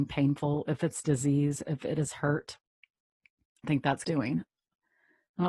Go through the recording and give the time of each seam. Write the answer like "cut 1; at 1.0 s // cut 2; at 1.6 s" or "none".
cut 1; at 3.6 s // cut 2; at 4.0 s